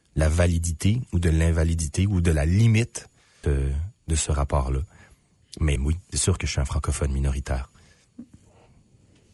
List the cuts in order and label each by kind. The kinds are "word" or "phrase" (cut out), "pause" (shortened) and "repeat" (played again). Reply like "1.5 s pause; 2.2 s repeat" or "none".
3.4 s phrase; 5.8 s word; 6.1 s phrase